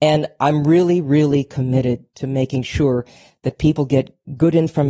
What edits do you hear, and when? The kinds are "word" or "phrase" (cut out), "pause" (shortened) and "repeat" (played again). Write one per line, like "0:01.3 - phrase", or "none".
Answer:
none